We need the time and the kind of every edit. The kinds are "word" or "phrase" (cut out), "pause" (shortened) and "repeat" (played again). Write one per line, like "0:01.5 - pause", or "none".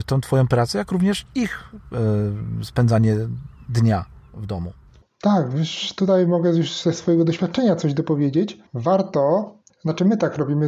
0:08.7 - pause